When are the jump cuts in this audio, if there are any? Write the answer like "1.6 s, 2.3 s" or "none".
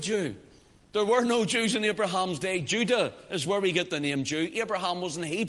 none